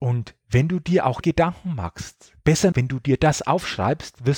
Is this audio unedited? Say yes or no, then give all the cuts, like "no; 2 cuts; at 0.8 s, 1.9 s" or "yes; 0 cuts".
no; 2 cuts; at 1.2 s, 2.7 s